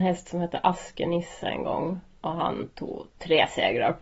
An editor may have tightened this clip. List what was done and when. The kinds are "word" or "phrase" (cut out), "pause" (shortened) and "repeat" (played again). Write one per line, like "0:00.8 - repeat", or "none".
none